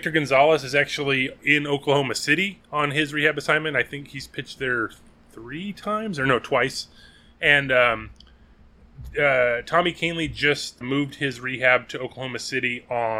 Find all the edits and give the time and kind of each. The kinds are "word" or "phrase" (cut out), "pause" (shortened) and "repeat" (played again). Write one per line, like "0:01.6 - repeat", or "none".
0:01.4 - word
0:10.8 - word